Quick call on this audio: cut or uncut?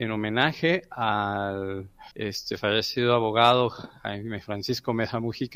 cut